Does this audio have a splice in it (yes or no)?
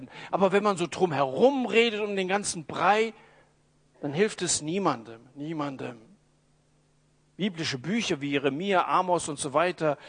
no